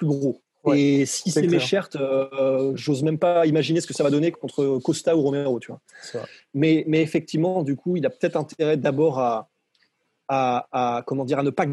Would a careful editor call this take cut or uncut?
uncut